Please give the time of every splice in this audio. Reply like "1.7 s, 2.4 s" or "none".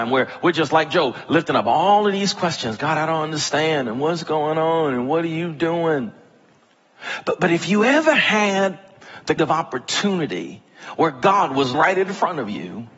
9.4 s, 11.7 s

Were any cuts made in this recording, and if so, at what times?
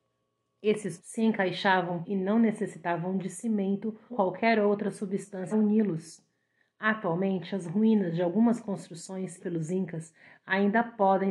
1.0 s, 2.0 s, 4.1 s, 5.5 s, 9.4 s

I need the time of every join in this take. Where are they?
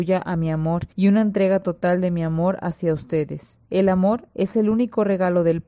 0.9 s, 3.6 s

